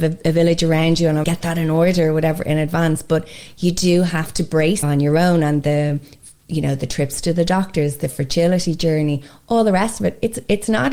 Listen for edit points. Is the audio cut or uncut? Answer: cut